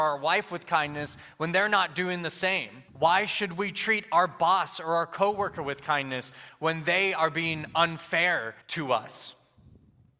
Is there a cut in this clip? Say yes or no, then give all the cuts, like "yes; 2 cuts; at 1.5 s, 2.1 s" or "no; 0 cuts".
yes; 2 cuts; at 2.9 s, 8.6 s